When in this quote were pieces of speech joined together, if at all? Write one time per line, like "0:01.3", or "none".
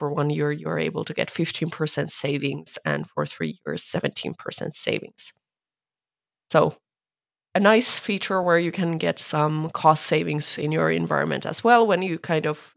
none